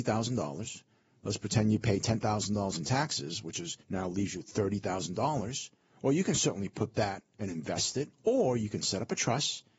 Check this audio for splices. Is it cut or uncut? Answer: cut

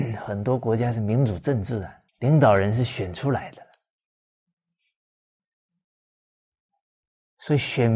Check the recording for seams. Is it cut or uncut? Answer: cut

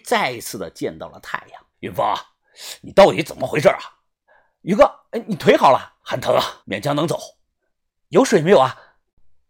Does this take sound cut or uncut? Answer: cut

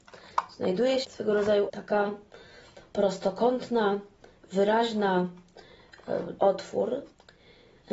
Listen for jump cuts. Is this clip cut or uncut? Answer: cut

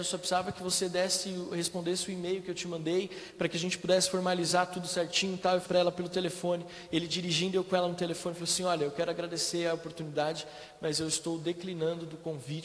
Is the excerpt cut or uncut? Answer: cut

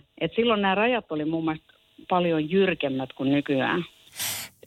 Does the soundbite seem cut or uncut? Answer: uncut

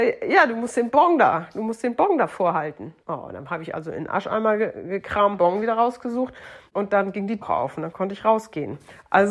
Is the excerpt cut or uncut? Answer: cut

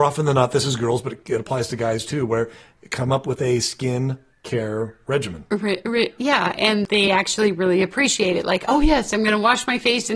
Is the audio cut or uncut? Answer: uncut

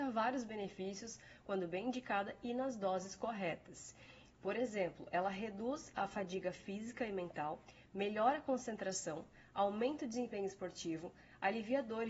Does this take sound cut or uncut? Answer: uncut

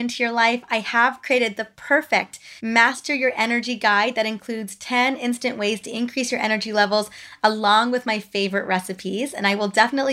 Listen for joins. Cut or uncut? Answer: cut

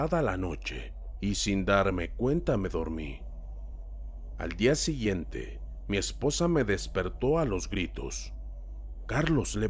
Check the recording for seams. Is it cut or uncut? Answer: uncut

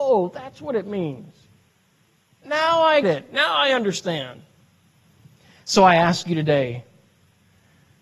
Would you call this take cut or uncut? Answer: cut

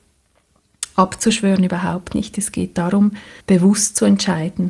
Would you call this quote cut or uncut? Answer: cut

